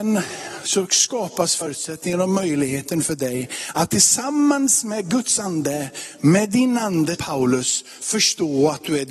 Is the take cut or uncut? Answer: cut